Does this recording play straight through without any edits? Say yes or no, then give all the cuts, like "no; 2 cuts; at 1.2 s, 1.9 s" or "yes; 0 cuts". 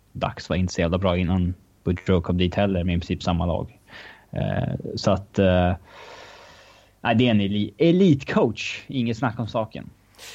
yes; 0 cuts